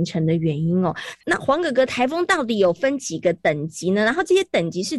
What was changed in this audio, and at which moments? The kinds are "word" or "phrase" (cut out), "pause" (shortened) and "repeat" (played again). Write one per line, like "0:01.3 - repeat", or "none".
0:01.2 - word